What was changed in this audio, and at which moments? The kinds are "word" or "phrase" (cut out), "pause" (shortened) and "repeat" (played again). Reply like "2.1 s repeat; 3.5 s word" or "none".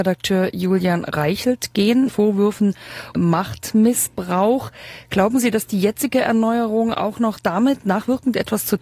2.1 s word; 3.1 s word